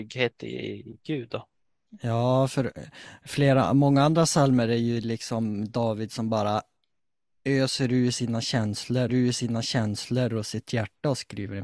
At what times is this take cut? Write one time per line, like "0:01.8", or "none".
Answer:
0:09.1